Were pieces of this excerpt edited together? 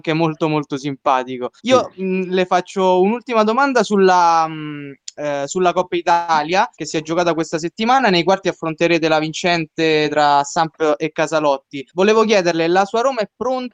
yes; 3 cuts; at 1.6 s, 6.7 s, 11.9 s

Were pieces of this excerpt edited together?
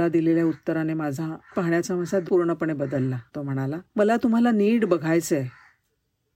yes; 4 cuts; at 1.5 s, 2.3 s, 3.3 s, 3.9 s

